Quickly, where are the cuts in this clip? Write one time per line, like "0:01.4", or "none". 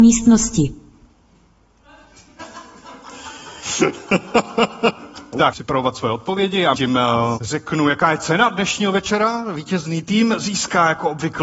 0:05.5
0:06.7
0:07.4